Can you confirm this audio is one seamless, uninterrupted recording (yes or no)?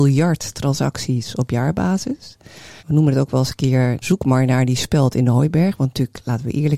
no